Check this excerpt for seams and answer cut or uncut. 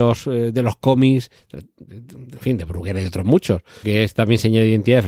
cut